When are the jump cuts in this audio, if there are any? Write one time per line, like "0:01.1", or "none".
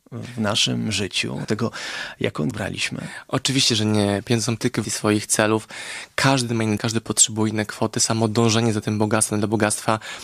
0:01.4
0:02.5
0:04.8
0:06.8